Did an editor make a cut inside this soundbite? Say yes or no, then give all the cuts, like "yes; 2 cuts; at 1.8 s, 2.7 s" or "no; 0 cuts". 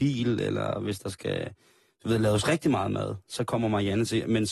no; 0 cuts